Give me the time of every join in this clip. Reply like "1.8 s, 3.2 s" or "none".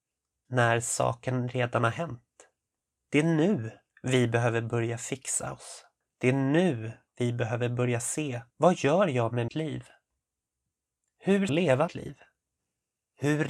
2.8 s, 3.9 s, 6.0 s, 7.1 s, 8.5 s, 9.5 s, 11.5 s, 11.9 s